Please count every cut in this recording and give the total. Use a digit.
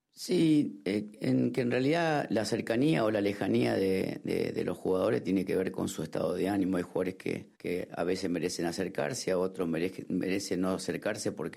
1